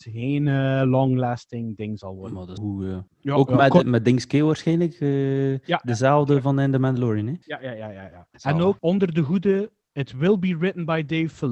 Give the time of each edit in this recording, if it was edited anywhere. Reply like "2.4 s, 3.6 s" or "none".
2.6 s, 3.1 s, 3.8 s, 7.4 s, 8.3 s, 8.8 s